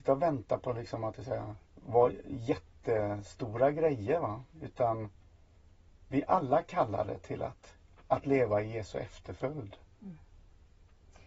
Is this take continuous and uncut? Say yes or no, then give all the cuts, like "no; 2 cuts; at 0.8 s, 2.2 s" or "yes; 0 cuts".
no; 2 cuts; at 1.6 s, 4.5 s